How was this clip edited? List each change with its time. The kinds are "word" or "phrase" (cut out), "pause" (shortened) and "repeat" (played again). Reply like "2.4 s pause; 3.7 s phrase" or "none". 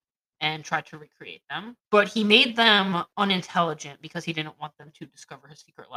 1.8 s pause